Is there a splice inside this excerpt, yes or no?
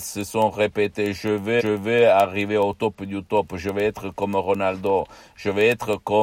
yes